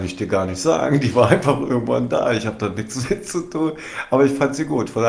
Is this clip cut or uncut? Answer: uncut